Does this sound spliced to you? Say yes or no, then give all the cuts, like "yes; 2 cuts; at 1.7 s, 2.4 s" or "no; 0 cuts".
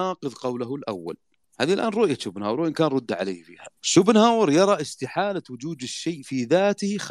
yes; 2 cuts; at 1.4 s, 3.8 s